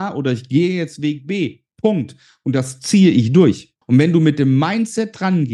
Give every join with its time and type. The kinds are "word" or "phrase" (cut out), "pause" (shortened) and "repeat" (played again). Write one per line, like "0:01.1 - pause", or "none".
0:03.8 - pause